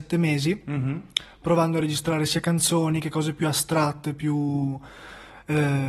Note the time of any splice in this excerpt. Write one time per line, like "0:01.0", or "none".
none